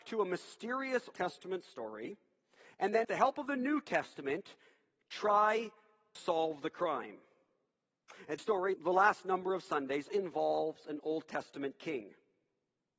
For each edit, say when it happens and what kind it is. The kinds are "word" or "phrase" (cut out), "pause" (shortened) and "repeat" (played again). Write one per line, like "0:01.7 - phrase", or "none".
0:01.1 - word
0:03.0 - word
0:06.2 - word
0:08.4 - word
0:08.7 - word
0:10.1 - word